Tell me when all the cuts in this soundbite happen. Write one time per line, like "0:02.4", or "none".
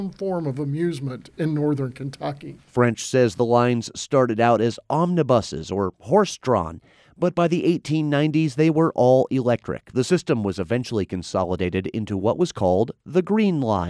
none